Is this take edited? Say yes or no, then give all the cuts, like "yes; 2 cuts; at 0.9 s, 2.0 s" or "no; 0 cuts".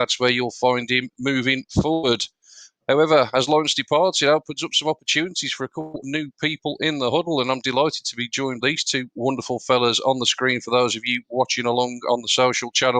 yes; 2 cuts; at 6.0 s, 8.6 s